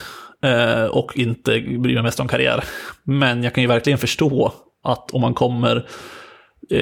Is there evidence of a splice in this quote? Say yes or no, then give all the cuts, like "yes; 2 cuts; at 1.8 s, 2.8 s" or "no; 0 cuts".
no; 0 cuts